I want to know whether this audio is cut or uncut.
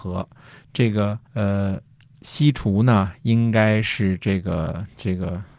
cut